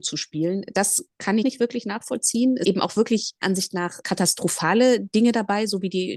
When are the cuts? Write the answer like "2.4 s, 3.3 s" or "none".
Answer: 1.4 s, 2.6 s, 3.4 s, 4.0 s